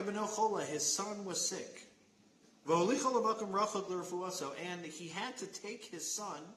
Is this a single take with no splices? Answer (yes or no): no